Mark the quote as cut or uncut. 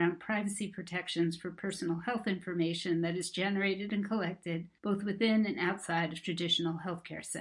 cut